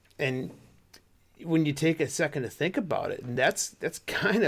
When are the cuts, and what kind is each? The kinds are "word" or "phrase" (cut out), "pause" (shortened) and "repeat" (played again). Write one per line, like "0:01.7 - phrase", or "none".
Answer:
none